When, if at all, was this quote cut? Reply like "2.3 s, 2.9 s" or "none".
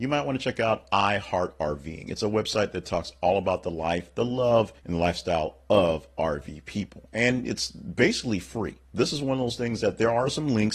4.8 s, 8.8 s